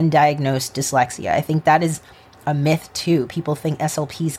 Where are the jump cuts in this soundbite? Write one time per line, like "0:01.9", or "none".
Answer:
none